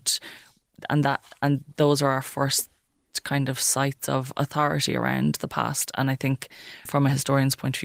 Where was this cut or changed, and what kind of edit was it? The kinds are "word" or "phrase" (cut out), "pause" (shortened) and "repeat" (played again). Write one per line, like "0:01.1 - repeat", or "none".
0:06.9 - word